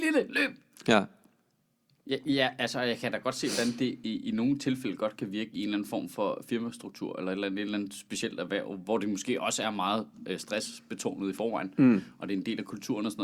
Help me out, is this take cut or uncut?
uncut